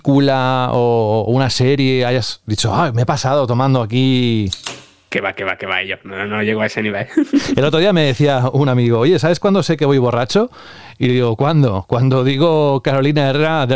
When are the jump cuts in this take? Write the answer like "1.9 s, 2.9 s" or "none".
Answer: none